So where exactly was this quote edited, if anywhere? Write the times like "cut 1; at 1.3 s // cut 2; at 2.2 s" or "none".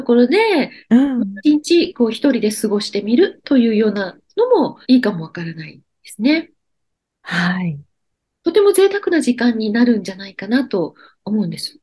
cut 1; at 1.4 s // cut 2; at 4.8 s